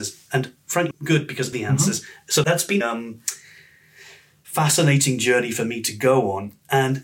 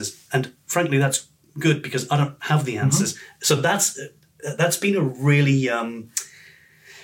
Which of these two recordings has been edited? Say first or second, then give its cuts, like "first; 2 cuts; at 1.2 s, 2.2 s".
first; 4 cuts; at 0.9 s, 1.5 s, 2.4 s, 2.8 s